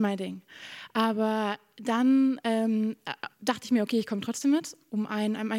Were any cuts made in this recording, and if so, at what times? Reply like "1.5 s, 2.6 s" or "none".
3.3 s